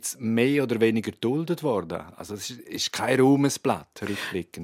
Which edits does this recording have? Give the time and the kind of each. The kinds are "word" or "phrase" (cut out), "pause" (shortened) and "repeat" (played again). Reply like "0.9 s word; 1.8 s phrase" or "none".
none